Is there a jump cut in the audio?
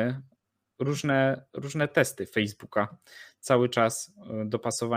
no; 0 cuts

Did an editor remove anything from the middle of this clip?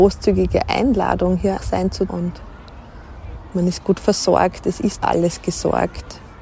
yes; 3 cuts; at 1.6 s, 2.1 s, 5.0 s

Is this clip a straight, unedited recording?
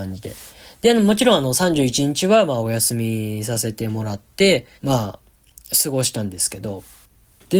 no; 1 cut; at 4.8 s

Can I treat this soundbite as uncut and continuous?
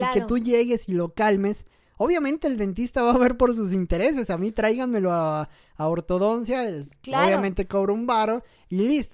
yes; 0 cuts

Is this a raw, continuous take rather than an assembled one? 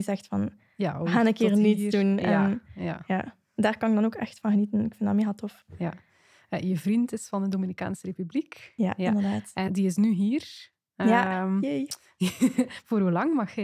no; 1 cut; at 9.7 s

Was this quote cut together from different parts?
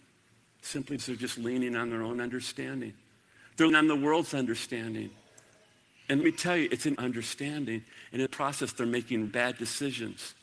yes; 6 cuts; at 1.0 s, 3.7 s, 6.2 s, 7.0 s, 8.3 s, 9.3 s

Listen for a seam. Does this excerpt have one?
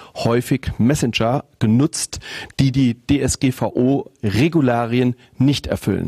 no; 0 cuts

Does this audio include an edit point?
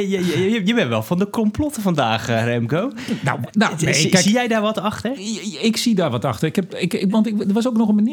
no; 0 cuts

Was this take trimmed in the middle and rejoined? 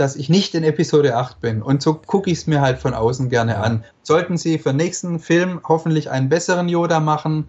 no; 0 cuts

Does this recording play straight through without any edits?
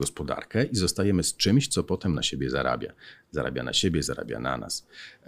yes; 0 cuts

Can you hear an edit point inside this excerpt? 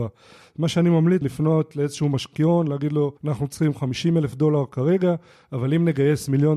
yes; 2 cuts; at 1.2 s, 3.2 s

